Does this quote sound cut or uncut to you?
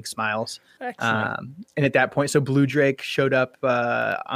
uncut